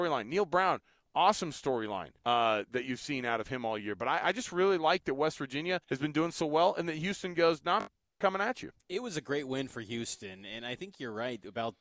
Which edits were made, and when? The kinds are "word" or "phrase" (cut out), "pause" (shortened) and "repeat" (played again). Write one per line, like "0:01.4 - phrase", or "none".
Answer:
0:02.2 - pause
0:05.8 - pause
0:08.8 - pause